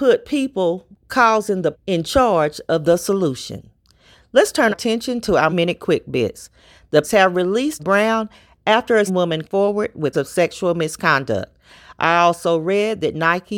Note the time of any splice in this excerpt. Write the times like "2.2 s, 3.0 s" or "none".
1.7 s, 4.7 s, 5.5 s, 7.0 s, 7.8 s, 9.1 s, 9.4 s, 10.1 s